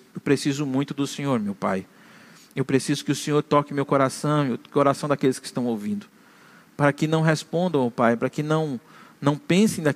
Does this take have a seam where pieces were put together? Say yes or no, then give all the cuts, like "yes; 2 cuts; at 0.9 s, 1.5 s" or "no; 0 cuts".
no; 0 cuts